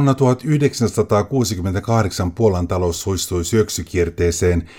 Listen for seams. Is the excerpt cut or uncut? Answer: uncut